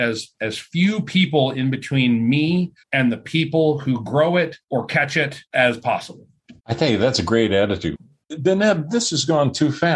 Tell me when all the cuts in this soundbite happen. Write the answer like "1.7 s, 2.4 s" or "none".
2.8 s, 4.6 s, 5.5 s, 6.6 s